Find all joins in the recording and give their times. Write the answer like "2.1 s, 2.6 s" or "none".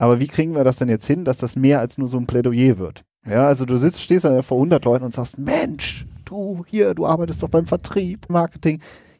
8.3 s